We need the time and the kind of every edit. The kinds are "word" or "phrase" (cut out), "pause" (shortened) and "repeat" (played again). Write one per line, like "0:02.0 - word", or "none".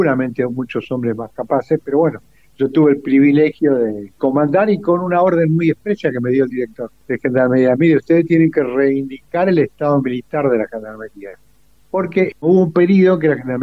none